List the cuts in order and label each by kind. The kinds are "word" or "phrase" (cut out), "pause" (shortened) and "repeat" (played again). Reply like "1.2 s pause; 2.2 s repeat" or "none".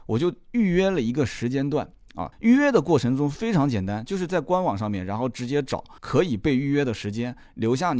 2.3 s pause; 6.0 s pause